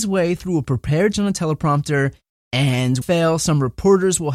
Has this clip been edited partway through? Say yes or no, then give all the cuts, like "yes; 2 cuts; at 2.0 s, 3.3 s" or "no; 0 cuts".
yes; 2 cuts; at 1.1 s, 3.0 s